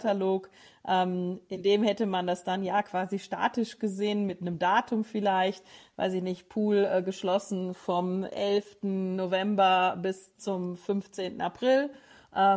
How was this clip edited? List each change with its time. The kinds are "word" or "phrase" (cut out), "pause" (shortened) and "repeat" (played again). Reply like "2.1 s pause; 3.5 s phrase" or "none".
none